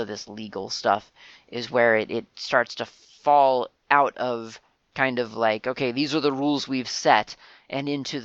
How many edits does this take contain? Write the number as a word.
zero